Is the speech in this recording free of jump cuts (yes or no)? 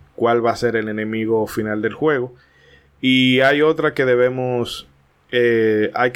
yes